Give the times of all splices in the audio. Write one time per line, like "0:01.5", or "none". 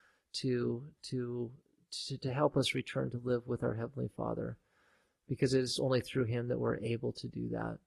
none